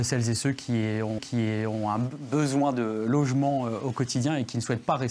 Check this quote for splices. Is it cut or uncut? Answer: cut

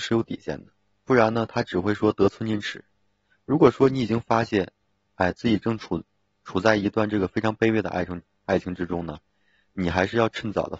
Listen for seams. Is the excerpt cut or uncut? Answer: uncut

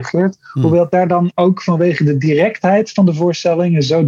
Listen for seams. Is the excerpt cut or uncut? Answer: uncut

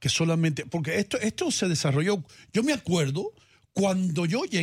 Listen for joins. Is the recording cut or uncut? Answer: uncut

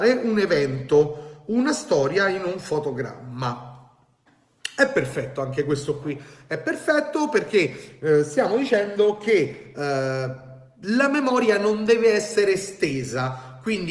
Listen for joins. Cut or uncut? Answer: uncut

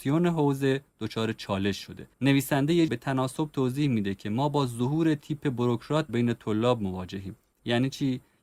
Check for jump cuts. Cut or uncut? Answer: cut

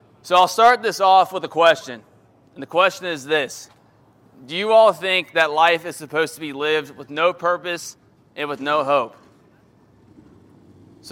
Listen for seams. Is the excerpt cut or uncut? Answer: uncut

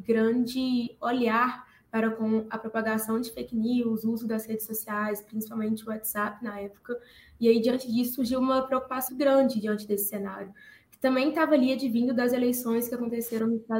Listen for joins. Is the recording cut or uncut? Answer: cut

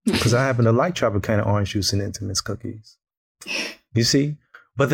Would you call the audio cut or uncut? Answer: uncut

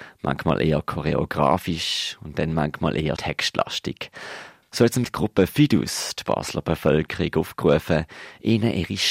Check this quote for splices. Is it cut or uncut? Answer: cut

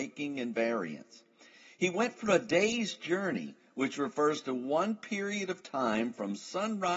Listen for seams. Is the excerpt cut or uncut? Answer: uncut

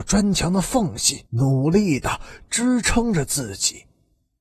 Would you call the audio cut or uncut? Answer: cut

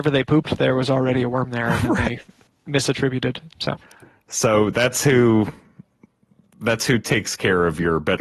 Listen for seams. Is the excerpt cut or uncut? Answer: uncut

